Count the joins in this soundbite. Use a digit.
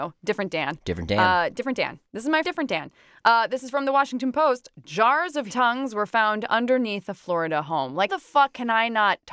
3